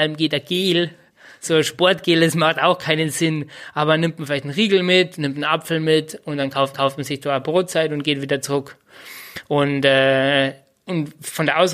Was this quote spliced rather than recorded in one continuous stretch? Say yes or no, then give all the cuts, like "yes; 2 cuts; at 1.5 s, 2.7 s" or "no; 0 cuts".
yes; 1 cut; at 6.7 s